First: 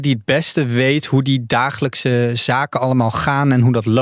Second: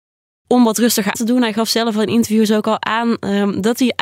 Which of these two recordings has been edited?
second; 1 cut; at 1.1 s

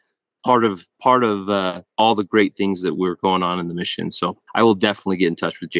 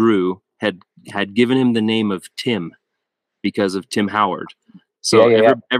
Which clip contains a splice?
first; 2 cuts; at 1.9 s, 4.5 s

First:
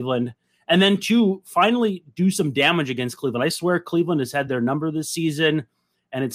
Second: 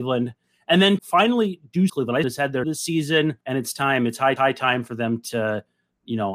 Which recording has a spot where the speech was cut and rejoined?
second; 6 cuts; at 1.0 s, 1.9 s, 2.2 s, 2.6 s, 3.4 s, 4.4 s

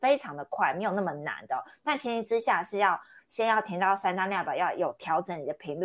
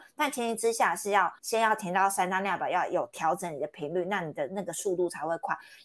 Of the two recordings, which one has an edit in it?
second; 1 cut; at 1.4 s

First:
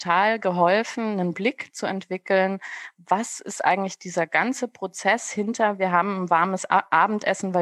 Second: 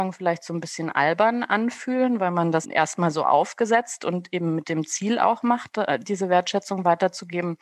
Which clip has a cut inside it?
second; 1 cut; at 2.6 s

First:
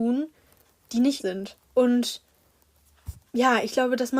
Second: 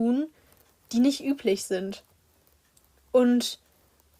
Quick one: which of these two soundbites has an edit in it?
first; 2 cuts; at 1.2 s, 1.6 s

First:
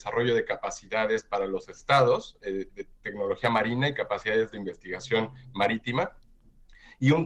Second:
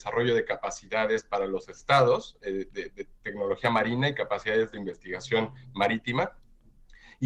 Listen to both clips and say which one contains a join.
first; 1 cut; at 2.7 s

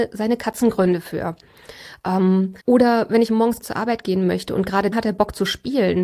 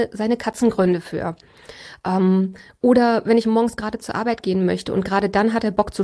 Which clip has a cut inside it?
first; 3 cuts; at 2.6 s, 3.6 s, 4.9 s

